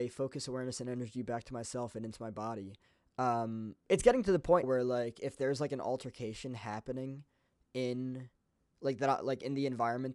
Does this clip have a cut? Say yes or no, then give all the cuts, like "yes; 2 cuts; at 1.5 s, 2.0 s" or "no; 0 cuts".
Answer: yes; 1 cut; at 4.6 s